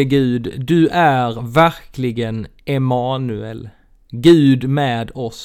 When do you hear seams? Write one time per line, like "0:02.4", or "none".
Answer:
none